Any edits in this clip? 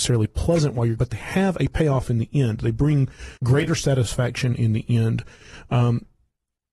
yes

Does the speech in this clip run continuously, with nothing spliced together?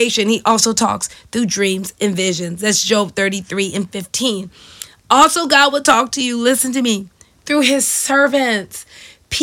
yes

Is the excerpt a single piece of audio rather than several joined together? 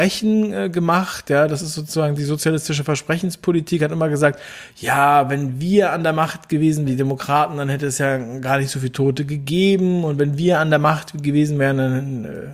no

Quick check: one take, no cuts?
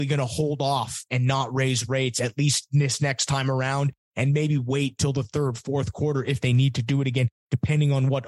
yes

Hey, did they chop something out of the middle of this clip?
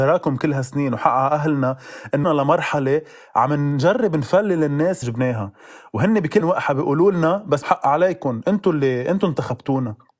yes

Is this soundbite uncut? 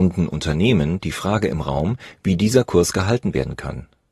yes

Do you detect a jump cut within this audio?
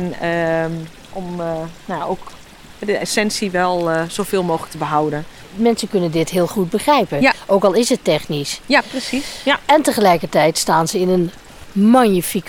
no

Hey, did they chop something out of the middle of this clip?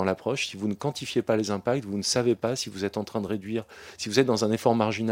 no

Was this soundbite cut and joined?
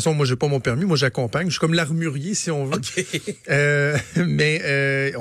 no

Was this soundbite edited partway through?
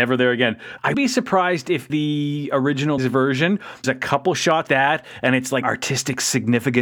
yes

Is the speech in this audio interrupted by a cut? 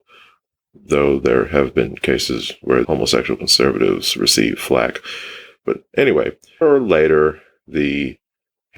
yes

